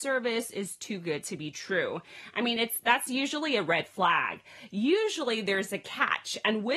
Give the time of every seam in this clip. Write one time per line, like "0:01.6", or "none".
none